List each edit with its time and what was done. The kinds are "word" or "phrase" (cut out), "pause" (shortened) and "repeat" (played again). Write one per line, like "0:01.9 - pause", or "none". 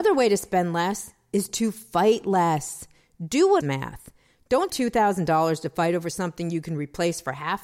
0:03.6 - phrase
0:04.7 - word